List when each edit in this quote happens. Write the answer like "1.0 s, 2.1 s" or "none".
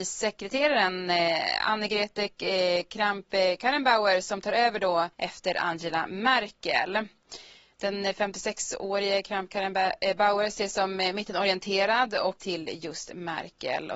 5.1 s, 12.4 s